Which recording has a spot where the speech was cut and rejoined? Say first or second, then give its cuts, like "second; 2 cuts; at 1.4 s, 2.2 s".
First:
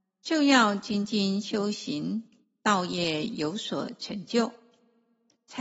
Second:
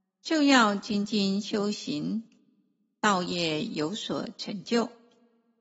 first; 1 cut; at 2.4 s